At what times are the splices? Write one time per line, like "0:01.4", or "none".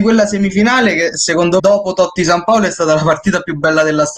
0:01.6